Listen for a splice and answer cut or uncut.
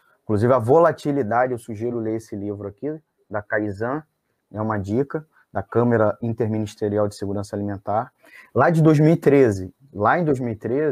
uncut